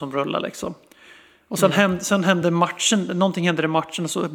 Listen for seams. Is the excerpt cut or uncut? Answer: uncut